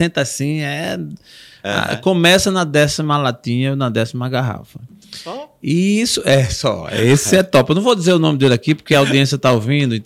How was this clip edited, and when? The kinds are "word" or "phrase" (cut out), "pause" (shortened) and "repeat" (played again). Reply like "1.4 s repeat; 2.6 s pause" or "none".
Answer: none